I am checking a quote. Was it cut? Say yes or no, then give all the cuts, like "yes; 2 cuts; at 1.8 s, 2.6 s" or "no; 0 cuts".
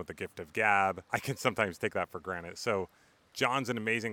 no; 0 cuts